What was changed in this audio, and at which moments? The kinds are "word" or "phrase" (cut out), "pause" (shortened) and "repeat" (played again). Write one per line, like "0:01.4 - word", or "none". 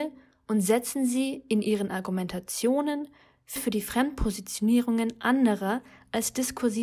0:03.6 - phrase